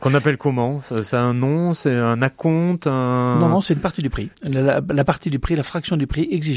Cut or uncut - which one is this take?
cut